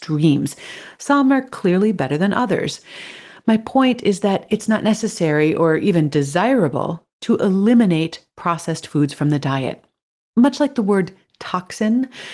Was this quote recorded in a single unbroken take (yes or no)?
yes